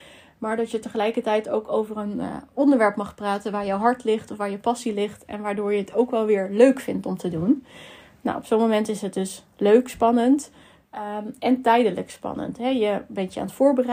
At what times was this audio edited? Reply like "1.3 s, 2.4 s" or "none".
none